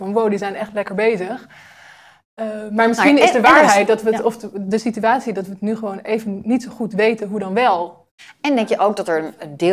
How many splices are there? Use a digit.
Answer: 0